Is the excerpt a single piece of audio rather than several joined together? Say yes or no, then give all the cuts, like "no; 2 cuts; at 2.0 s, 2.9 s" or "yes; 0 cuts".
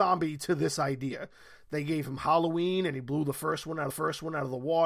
no; 1 cut; at 3.9 s